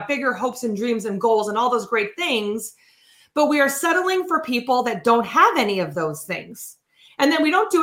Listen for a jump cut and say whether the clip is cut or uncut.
uncut